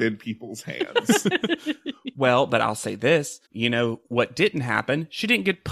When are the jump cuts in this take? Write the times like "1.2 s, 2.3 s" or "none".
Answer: 3.5 s